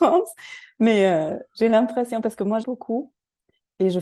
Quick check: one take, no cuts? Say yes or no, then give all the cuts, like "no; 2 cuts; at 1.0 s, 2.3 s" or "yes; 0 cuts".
no; 1 cut; at 2.6 s